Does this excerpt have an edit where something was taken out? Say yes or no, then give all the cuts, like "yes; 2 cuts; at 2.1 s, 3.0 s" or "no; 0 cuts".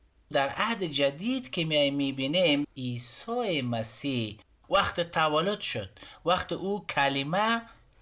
no; 0 cuts